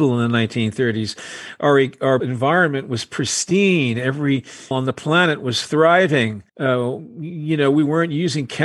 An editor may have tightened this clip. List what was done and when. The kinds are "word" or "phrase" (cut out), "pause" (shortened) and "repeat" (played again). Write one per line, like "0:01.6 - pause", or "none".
0:02.2 - word
0:04.7 - word
0:06.5 - pause